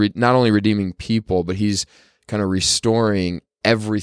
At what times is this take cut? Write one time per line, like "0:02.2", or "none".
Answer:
none